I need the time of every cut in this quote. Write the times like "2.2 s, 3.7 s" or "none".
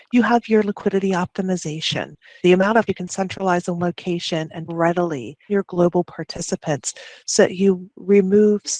2.4 s, 2.9 s, 3.8 s, 4.7 s, 5.5 s, 6.0 s